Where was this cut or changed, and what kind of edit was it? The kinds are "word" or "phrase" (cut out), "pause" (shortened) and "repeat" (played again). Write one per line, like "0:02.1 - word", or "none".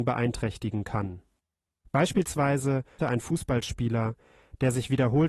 0:03.0 - word